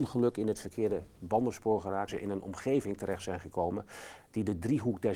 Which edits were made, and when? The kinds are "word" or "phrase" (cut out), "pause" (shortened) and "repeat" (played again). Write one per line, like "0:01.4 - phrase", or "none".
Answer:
0:02.1 - word